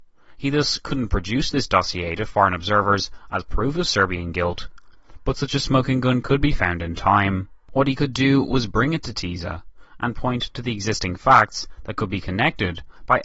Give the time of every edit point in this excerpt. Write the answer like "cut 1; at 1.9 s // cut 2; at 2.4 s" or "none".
cut 1; at 7.6 s